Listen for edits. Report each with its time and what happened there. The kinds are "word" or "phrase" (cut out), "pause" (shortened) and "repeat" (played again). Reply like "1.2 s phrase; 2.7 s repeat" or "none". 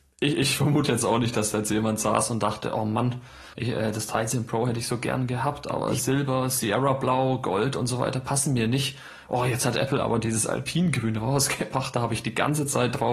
3.5 s pause